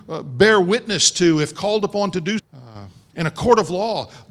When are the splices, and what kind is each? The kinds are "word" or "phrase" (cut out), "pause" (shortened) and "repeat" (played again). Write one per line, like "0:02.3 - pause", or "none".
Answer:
0:02.4 - word